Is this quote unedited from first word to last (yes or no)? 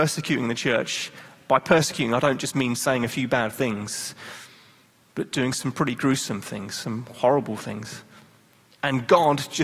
yes